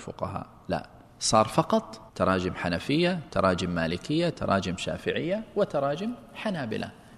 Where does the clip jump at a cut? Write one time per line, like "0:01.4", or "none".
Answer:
0:02.1